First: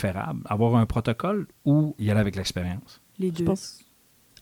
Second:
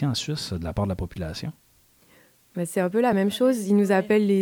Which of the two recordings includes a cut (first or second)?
first